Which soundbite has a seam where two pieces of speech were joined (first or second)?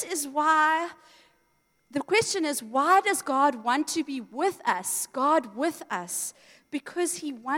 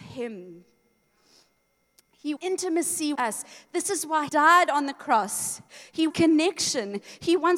second